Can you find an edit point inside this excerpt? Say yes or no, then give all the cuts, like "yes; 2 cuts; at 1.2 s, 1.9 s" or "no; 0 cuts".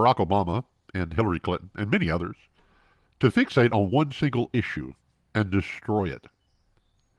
no; 0 cuts